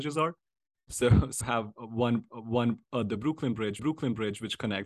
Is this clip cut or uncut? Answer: cut